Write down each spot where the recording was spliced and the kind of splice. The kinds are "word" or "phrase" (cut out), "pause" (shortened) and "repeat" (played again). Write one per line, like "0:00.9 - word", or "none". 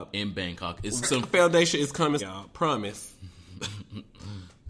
0:01.0 - word
0:02.2 - word